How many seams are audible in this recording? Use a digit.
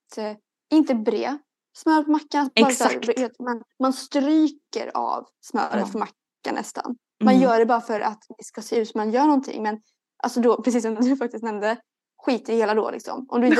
0